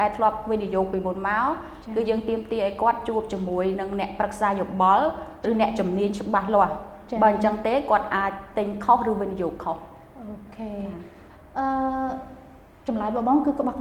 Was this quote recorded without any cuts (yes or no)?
no